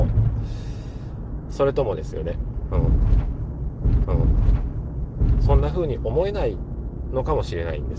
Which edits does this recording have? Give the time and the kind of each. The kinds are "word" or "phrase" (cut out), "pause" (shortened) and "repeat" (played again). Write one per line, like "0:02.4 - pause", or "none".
0:04.0 - repeat